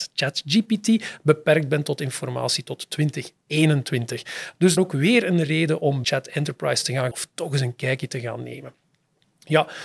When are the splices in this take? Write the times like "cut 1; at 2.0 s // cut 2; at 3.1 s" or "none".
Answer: cut 1; at 4.8 s // cut 2; at 6.0 s // cut 3; at 7.1 s